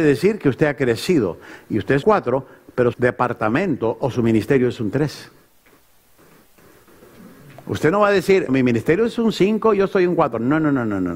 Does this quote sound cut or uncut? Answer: cut